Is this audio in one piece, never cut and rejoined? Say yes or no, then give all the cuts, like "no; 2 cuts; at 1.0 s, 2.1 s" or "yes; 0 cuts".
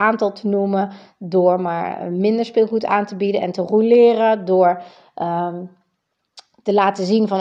yes; 0 cuts